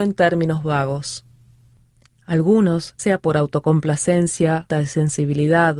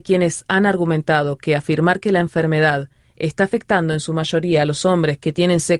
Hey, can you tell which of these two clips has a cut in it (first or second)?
first